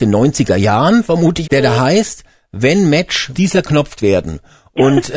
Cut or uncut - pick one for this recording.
cut